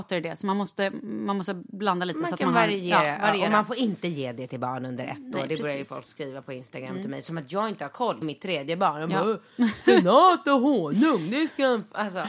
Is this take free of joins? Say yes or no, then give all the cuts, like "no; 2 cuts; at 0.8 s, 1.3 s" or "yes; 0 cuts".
no; 1 cut; at 8.2 s